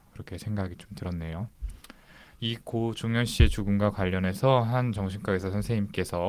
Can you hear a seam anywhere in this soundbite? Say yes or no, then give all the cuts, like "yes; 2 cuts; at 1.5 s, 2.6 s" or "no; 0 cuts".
no; 0 cuts